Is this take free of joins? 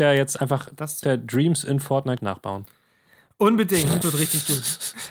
no; 3 cuts; at 1.0 s, 2.2 s, 4.0 s

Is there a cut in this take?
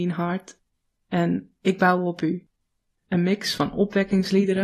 no; 0 cuts

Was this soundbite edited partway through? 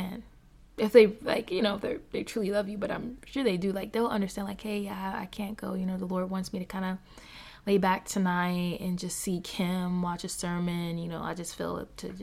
no; 0 cuts

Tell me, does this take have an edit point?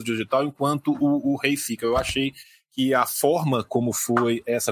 no; 0 cuts

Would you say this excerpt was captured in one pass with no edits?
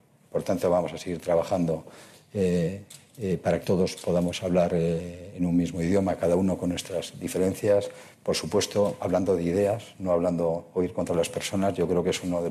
no; 1 cut; at 3.6 s

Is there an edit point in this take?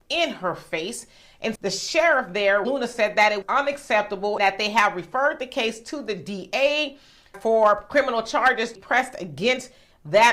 yes; 6 cuts; at 1.6 s, 2.6 s, 3.4 s, 4.4 s, 7.3 s, 8.8 s

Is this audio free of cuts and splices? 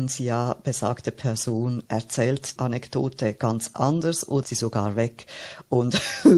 no; 3 cuts; at 1.8 s, 2.6 s, 4.4 s

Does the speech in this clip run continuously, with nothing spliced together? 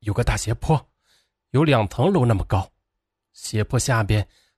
yes; 0 cuts

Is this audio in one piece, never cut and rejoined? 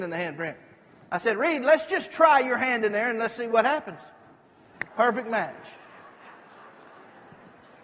no; 1 cut; at 4.9 s

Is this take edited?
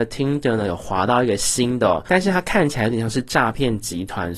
no; 0 cuts

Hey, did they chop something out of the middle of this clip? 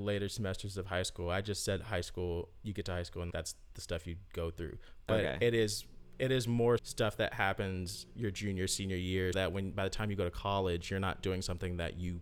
yes; 3 cuts; at 3.3 s, 6.8 s, 9.3 s

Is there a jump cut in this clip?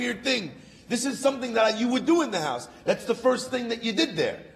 no; 0 cuts

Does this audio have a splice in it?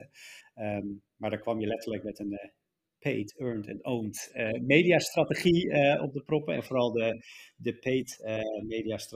no; 0 cuts

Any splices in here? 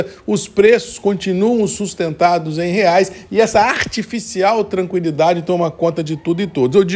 no; 0 cuts

